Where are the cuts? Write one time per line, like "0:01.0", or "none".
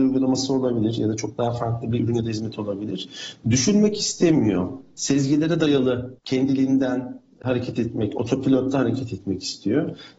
0:06.2